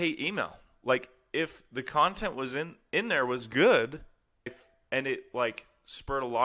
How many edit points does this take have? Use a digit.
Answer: 1